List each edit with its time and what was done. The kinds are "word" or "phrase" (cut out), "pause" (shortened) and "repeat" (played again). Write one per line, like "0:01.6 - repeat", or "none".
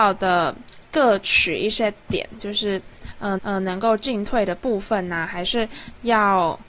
0:03.4 - repeat